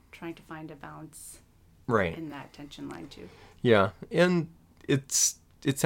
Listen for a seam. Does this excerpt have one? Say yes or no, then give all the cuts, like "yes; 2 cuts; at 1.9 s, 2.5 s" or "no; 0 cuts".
no; 0 cuts